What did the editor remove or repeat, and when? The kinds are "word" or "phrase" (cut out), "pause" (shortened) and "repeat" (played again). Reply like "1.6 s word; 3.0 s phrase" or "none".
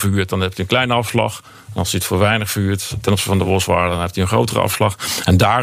none